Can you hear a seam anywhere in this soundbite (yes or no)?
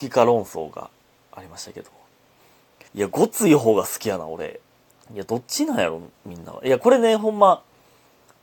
yes